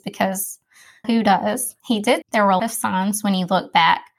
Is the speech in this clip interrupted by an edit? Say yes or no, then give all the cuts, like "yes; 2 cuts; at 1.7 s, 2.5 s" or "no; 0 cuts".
yes; 4 cuts; at 1.0 s, 1.8 s, 2.2 s, 2.6 s